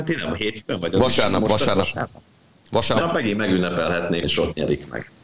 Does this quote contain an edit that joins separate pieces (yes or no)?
yes